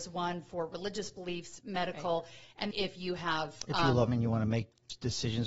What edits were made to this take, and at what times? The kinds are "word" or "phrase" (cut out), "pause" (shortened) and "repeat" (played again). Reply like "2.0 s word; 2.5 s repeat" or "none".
2.7 s word; 4.1 s word